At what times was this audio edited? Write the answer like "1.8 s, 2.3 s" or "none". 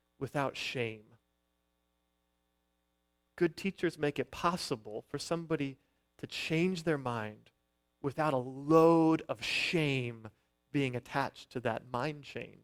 none